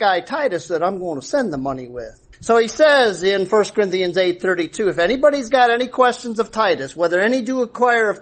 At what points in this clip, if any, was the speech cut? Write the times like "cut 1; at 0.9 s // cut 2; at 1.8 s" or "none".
cut 1; at 2.3 s